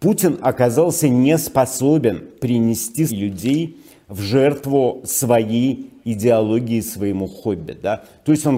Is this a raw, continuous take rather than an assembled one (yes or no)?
no